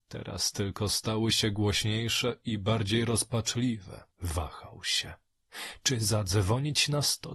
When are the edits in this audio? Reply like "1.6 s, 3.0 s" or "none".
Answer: 4.1 s